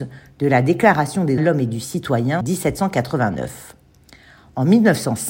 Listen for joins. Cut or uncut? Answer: cut